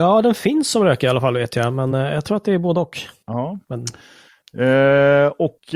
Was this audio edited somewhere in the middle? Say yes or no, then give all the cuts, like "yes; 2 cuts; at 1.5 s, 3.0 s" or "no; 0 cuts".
no; 0 cuts